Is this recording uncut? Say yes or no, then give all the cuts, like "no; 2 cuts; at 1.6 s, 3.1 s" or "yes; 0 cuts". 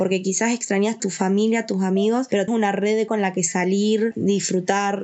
no; 3 cuts; at 1.0 s, 2.5 s, 3.1 s